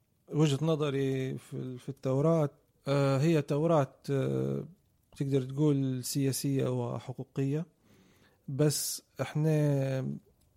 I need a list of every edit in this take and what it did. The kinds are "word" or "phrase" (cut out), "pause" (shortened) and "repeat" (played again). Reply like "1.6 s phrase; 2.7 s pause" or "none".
none